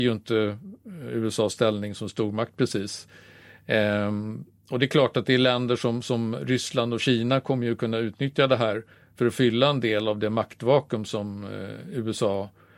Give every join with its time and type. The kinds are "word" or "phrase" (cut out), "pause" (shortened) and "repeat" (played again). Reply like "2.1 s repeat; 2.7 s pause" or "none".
none